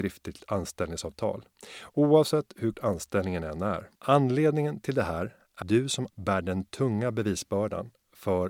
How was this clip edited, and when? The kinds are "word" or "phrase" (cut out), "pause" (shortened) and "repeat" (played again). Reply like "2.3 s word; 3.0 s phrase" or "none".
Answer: 2.7 s word; 4.0 s pause; 5.6 s word; 6.1 s word